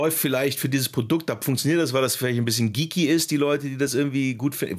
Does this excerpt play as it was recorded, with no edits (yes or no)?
yes